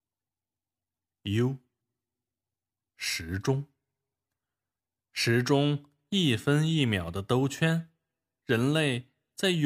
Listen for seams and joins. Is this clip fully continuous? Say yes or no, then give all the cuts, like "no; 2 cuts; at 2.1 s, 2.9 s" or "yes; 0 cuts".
yes; 0 cuts